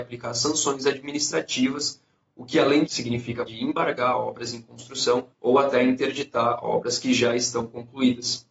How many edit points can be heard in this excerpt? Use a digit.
3